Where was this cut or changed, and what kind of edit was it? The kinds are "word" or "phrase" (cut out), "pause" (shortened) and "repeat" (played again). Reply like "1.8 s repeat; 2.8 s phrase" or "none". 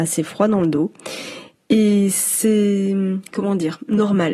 none